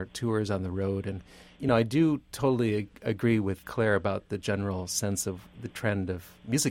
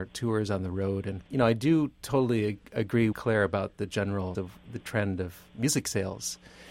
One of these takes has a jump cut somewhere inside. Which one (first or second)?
second